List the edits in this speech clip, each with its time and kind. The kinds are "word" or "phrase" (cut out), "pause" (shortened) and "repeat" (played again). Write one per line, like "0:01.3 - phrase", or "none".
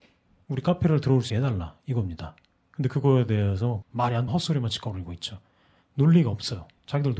0:01.3 - word
0:03.8 - word
0:04.3 - word